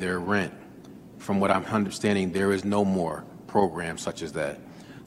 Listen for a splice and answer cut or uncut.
uncut